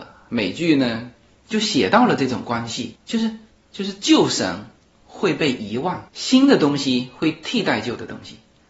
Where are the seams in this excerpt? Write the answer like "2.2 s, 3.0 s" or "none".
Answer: 6.1 s